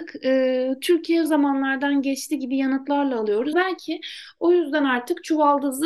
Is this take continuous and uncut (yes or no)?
no